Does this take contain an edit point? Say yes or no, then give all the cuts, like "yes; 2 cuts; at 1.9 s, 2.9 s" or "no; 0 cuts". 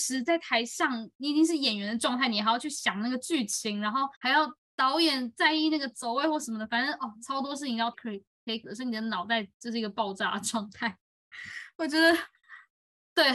yes; 4 cuts; at 4.1 s, 4.6 s, 7.9 s, 8.6 s